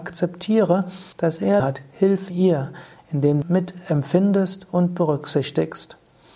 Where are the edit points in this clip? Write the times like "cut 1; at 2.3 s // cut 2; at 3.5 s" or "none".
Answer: cut 1; at 1.1 s // cut 2; at 1.6 s // cut 3; at 2.3 s // cut 4; at 3.4 s